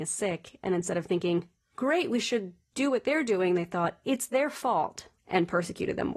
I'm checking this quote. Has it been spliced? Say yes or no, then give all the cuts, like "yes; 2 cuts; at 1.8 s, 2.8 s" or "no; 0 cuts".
yes; 1 cut; at 5.2 s